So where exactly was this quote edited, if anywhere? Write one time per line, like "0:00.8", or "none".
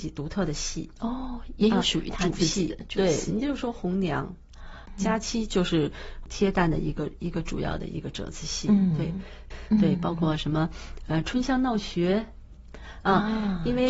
none